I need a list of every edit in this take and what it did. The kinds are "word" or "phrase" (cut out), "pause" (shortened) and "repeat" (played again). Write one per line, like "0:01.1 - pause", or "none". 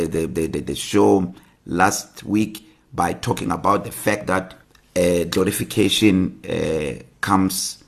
none